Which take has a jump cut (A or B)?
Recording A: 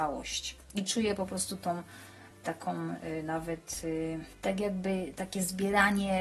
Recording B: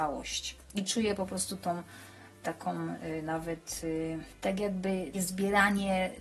B